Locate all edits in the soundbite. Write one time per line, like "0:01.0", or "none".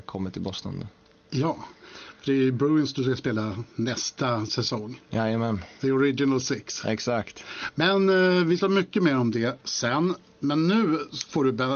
0:08.6